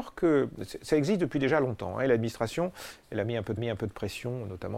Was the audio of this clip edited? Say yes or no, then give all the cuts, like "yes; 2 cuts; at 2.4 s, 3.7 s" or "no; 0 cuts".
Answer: yes; 1 cut; at 3.6 s